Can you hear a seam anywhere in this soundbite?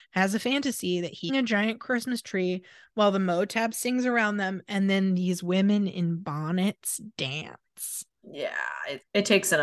yes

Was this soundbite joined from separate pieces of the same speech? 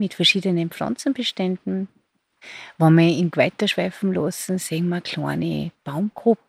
yes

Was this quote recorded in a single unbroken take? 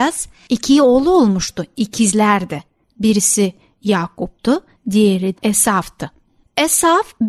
no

